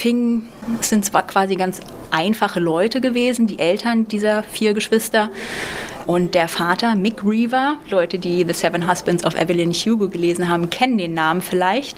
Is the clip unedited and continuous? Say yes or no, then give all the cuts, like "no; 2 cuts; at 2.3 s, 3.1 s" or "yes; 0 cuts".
no; 1 cut; at 6.1 s